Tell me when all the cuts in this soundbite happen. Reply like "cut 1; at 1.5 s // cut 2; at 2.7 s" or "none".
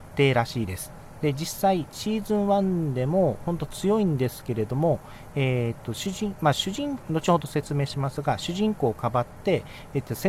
cut 1; at 7.0 s